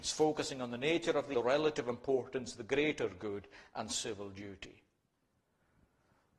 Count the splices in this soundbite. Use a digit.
1